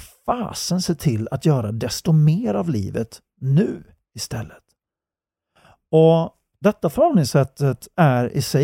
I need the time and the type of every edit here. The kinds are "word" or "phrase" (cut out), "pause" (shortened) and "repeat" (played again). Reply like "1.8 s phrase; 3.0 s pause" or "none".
none